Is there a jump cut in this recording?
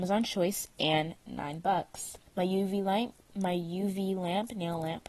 yes; 1 cut; at 2.3 s

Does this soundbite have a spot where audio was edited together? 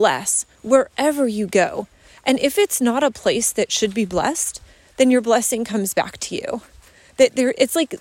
no; 0 cuts

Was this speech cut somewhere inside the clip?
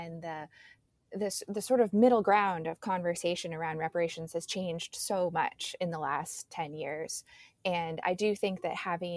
no; 0 cuts

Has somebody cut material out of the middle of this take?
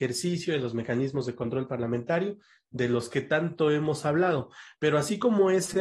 no; 0 cuts

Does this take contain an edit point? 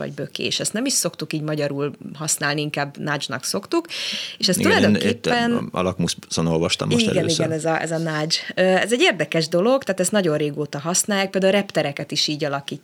no; 0 cuts

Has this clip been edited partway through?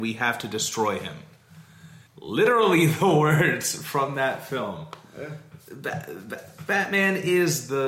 yes; 1 cut; at 2.1 s

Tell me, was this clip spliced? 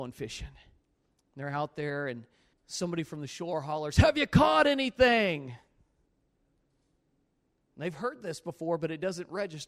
yes; 1 cut; at 2.5 s

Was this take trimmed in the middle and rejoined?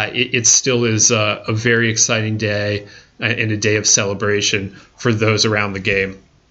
no; 0 cuts

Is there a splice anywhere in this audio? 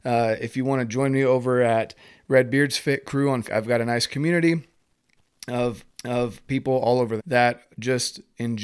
yes; 3 cuts; at 3.4 s, 5.9 s, 7.2 s

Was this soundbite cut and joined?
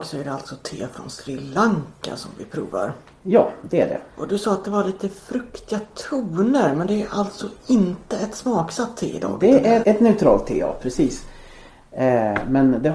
yes; 2 cuts; at 4.1 s, 9.8 s

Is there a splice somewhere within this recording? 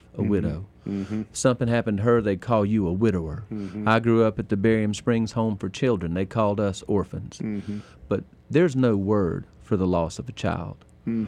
no; 0 cuts

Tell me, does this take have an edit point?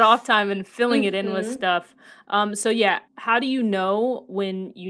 yes; 1 cut; at 3.1 s

